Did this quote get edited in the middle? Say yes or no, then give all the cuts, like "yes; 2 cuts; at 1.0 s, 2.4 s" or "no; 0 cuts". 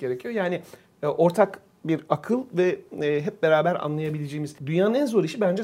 yes; 1 cut; at 4.6 s